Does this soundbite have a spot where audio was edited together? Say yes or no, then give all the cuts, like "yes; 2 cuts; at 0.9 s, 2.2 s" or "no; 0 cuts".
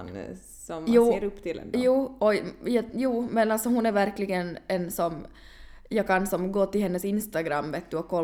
no; 0 cuts